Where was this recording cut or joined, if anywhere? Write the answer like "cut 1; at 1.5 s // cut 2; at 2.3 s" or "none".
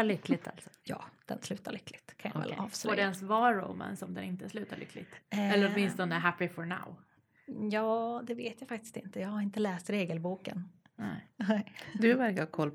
none